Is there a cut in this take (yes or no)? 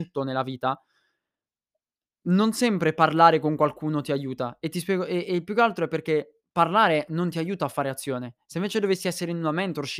no